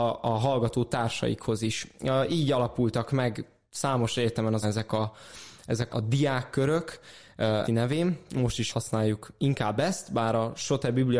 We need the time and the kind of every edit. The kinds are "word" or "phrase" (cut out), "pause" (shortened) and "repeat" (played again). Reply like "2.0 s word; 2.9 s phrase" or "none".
4.6 s word; 5.9 s word; 7.6 s word; 8.7 s word